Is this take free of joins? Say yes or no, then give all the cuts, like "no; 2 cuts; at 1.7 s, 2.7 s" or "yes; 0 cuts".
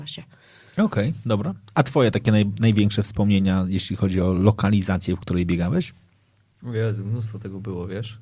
yes; 0 cuts